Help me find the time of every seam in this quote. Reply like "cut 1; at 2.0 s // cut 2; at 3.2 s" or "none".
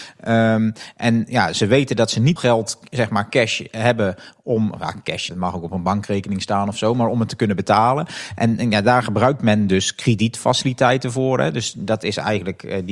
cut 1; at 2.4 s // cut 2; at 5.3 s